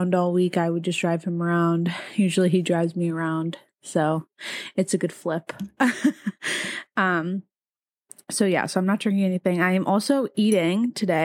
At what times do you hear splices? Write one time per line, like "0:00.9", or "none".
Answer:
none